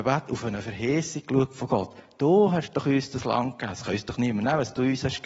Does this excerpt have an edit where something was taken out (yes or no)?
no